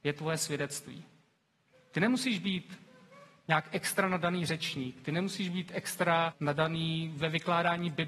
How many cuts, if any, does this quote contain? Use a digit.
1